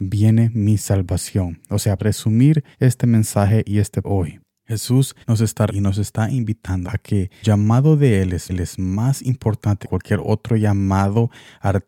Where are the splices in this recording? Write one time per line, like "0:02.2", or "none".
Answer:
0:02.0
0:02.7
0:04.0
0:05.2
0:05.7
0:06.8
0:07.4
0:08.5
0:09.8